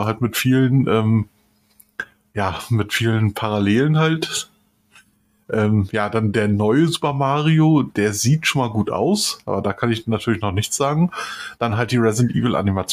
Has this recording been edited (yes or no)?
no